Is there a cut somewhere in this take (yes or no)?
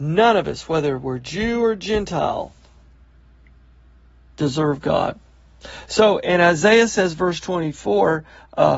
no